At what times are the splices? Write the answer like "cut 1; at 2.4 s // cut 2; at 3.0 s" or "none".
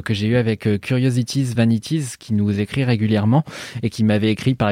none